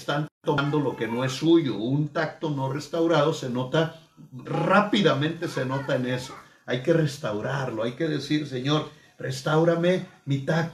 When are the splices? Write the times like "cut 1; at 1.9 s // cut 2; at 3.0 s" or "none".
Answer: cut 1; at 4.5 s

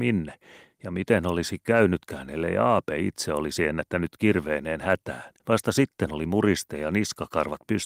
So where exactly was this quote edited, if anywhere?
cut 1; at 5.4 s

